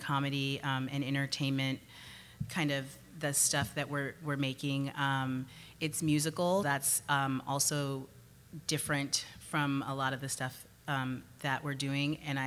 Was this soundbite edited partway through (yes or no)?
yes